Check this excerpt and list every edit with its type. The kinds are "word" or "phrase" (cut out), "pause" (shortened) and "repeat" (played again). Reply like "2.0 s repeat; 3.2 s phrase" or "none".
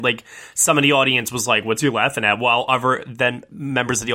none